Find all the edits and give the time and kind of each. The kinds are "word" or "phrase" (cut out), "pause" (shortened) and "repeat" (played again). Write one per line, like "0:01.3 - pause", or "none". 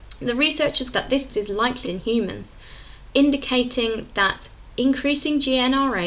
0:00.9 - word
0:01.3 - word
0:01.8 - word
0:03.1 - word